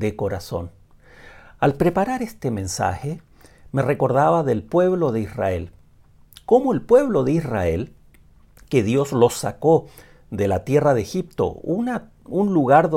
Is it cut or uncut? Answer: uncut